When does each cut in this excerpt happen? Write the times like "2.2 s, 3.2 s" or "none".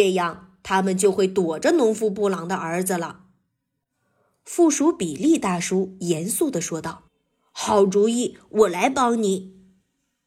7.1 s